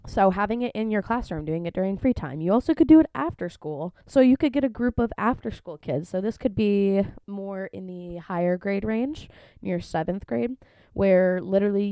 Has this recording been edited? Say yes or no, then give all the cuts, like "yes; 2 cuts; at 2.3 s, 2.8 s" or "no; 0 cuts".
yes; 2 cuts; at 4.0 s, 7.2 s